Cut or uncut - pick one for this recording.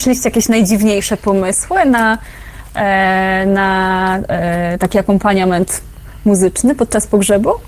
uncut